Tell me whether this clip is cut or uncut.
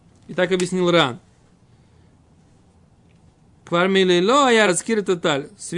cut